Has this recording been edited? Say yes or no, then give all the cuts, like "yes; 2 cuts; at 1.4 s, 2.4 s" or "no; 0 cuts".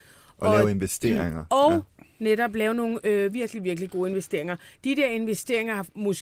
no; 0 cuts